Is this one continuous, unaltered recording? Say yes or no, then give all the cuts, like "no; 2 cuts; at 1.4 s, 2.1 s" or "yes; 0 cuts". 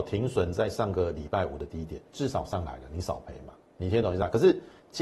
no; 2 cuts; at 2.1 s, 3.6 s